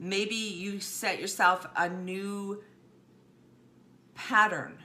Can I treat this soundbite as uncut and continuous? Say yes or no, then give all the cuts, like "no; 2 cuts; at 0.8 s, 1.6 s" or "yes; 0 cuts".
yes; 0 cuts